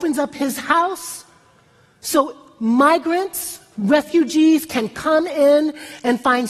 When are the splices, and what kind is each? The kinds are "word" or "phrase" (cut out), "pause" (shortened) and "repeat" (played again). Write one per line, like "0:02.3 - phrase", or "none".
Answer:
none